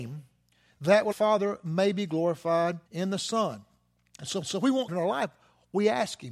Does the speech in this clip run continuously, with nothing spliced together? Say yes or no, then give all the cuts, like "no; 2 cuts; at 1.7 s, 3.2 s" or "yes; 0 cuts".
no; 4 cuts; at 1.1 s, 2.9 s, 4.4 s, 4.9 s